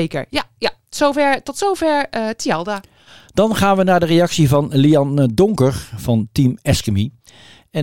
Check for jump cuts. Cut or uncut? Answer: uncut